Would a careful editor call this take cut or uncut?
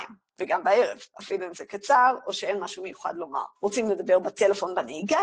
cut